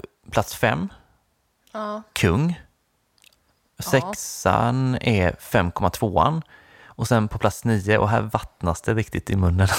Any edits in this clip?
no; 0 cuts

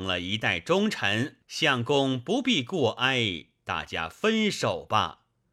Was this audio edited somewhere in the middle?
yes; 1 cut; at 1.4 s

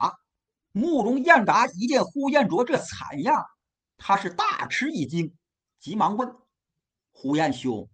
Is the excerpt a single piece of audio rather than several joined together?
yes; 0 cuts

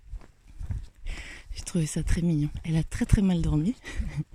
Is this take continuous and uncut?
yes; 0 cuts

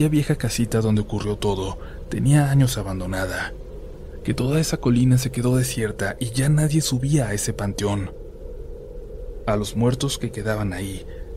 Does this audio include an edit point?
no; 0 cuts

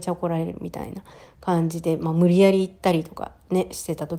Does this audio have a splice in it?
no; 0 cuts

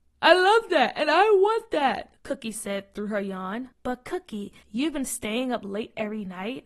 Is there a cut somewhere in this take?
yes; 3 cuts; at 2.2 s, 3.7 s, 4.6 s

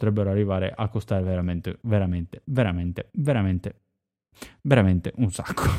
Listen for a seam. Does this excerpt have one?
no; 0 cuts

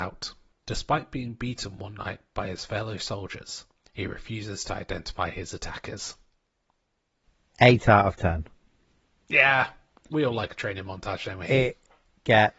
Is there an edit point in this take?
no; 0 cuts

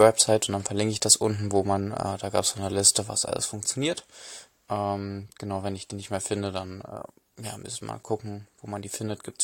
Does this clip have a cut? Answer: no; 0 cuts

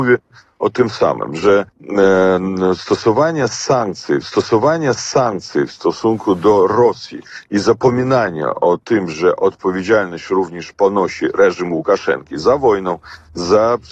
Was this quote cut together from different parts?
yes; 2 cuts; at 1.7 s, 4.2 s

